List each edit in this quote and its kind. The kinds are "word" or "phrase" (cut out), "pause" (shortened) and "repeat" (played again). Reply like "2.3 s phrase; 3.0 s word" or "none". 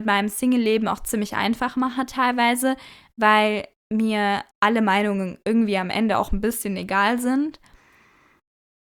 4.5 s pause